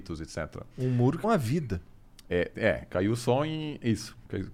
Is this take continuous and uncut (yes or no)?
no